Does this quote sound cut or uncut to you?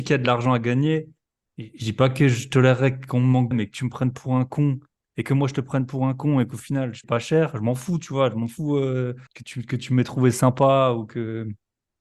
cut